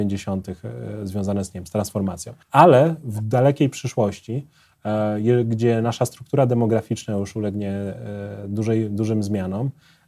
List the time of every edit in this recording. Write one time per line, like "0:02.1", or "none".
0:02.4

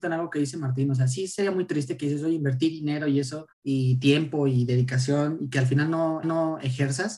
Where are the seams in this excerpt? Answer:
0:03.5
0:06.2

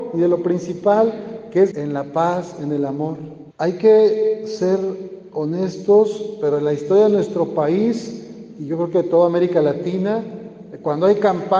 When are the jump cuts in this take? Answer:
0:01.7
0:03.5

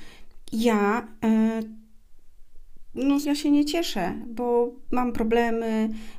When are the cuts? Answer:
0:03.2

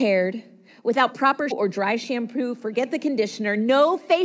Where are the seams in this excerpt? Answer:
0:01.5

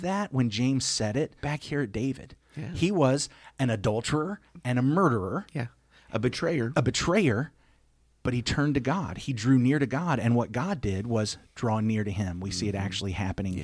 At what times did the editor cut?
0:01.4

